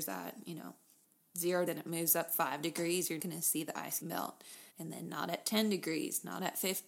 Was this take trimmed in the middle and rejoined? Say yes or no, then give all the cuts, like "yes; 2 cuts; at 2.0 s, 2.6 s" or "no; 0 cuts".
yes; 4 cuts; at 1.7 s, 3.2 s, 4.0 s, 4.7 s